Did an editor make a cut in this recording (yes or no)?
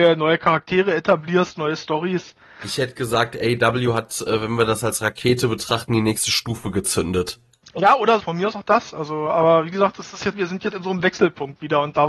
yes